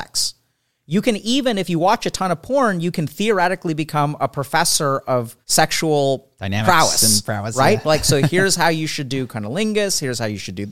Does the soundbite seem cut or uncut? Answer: cut